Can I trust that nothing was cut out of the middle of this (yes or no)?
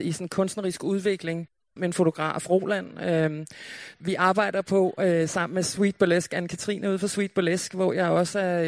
no